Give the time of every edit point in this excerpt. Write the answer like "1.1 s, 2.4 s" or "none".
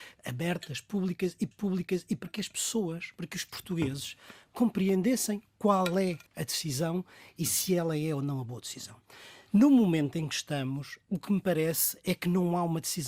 1.5 s, 6.3 s